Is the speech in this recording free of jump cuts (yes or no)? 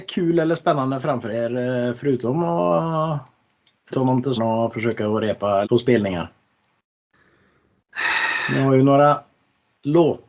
no